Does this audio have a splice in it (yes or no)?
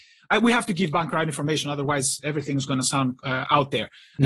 no